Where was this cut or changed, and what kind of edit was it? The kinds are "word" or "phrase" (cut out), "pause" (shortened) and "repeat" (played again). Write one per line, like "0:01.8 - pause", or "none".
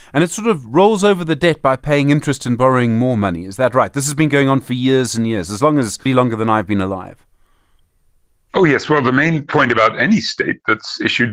0:06.1 - word